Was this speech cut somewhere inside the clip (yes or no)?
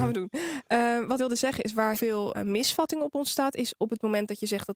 yes